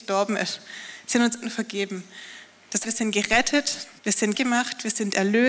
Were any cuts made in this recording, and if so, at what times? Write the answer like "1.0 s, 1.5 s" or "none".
1.4 s, 2.8 s, 4.0 s, 4.3 s